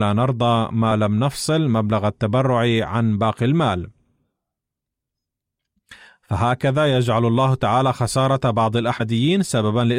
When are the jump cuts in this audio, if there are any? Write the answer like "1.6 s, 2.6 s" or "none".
none